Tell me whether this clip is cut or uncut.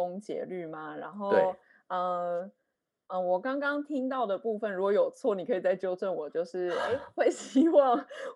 uncut